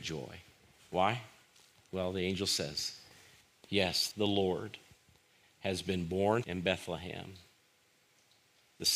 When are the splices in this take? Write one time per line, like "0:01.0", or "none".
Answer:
0:03.6
0:04.1
0:06.4